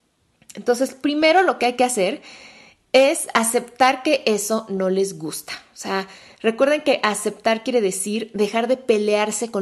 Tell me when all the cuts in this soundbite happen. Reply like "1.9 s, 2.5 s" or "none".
none